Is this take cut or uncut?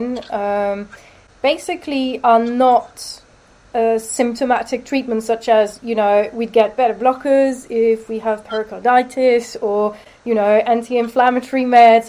uncut